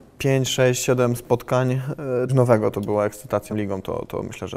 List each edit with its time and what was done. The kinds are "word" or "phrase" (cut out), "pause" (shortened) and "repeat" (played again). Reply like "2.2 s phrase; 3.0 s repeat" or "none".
2.3 s phrase; 3.5 s word

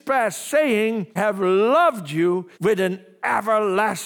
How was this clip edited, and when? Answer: 1.2 s word; 2.5 s pause

